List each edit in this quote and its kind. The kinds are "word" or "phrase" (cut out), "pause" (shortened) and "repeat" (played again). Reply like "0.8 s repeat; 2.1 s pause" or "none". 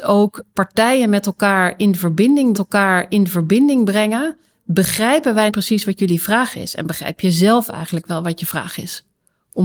2.5 s repeat; 5.5 s word

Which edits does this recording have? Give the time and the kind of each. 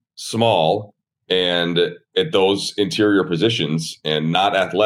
none

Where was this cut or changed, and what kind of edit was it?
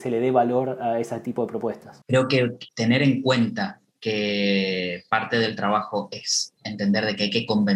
6.6 s pause

